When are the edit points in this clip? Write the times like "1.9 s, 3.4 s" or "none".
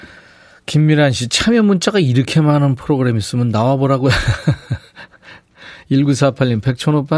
none

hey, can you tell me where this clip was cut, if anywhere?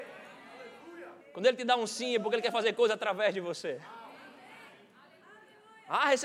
1.2 s

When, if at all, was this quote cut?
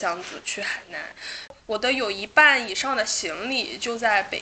1.6 s

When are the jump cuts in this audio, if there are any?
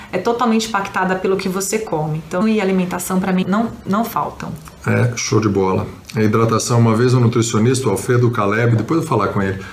1.4 s, 2.4 s, 3.4 s

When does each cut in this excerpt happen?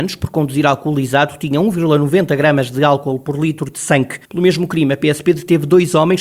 4.2 s

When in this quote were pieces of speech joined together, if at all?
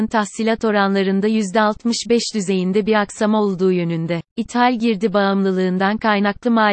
4.3 s

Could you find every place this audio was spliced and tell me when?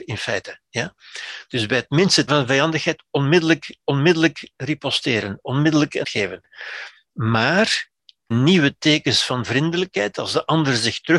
2.3 s, 3.8 s, 6.0 s, 8.3 s

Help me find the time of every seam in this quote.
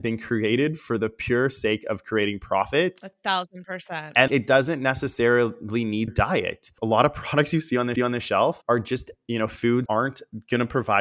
4.3 s, 6.1 s, 8.0 s, 9.9 s

